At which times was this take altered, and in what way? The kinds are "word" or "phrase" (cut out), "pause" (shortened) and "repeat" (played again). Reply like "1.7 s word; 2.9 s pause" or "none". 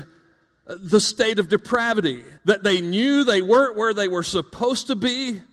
2.4 s pause